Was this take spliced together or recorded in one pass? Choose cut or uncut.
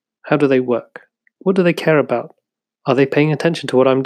uncut